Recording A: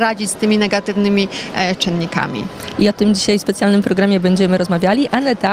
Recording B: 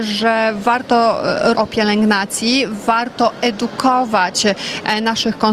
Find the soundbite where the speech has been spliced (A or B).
B